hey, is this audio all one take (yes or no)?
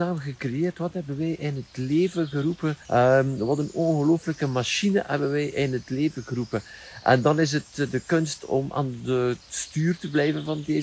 no